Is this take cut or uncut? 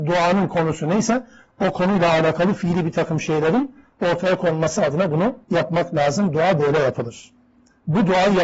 cut